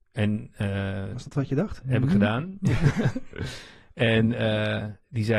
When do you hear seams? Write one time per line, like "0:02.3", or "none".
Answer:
none